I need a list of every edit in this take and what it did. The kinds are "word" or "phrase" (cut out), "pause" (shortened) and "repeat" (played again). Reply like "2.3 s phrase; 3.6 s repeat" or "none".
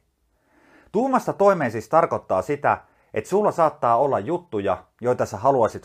none